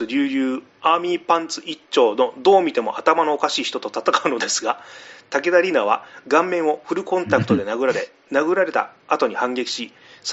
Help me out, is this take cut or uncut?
uncut